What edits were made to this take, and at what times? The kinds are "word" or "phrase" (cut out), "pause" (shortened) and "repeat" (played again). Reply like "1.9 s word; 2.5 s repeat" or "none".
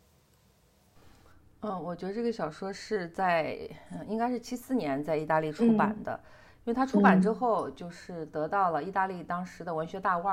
none

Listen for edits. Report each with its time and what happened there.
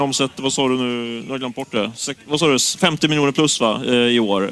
none

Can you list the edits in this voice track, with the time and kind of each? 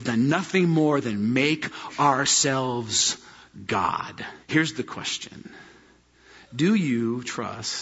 4.4 s pause

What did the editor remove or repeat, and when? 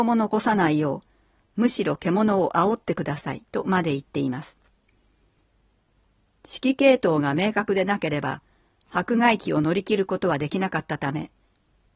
3.5 s pause

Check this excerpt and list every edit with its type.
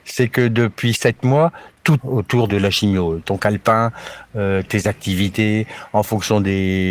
2.0 s word; 2.5 s word; 3.2 s word

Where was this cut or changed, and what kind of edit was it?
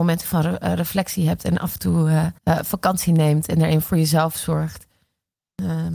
2.4 s pause

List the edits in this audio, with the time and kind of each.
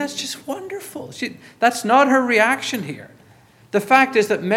none

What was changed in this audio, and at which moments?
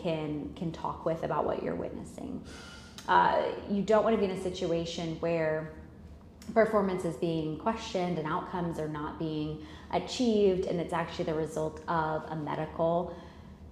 none

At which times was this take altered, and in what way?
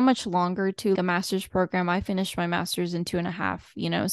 0.9 s word

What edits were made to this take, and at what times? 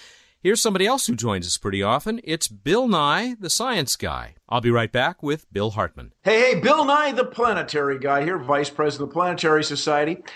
4.4 s pause; 6.2 s pause

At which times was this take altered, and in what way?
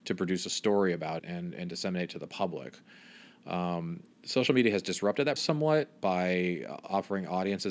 1.2 s word; 4.1 s pause; 5.4 s word; 6.0 s word

